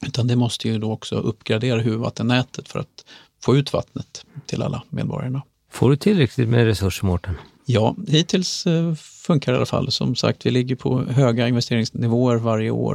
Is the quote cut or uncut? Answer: uncut